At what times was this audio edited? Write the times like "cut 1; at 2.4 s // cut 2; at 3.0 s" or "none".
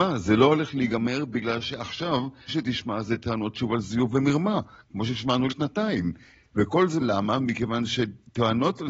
cut 1; at 2.5 s // cut 2; at 5.5 s // cut 3; at 7.0 s